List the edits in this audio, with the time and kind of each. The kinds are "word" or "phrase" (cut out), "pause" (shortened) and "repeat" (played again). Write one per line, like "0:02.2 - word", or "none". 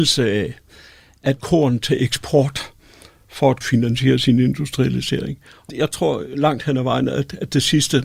0:01.4 - word
0:03.6 - word
0:05.7 - word